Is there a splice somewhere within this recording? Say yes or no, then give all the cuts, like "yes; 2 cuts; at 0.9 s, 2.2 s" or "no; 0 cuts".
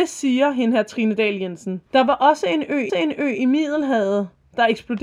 yes; 2 cuts; at 1.9 s, 2.9 s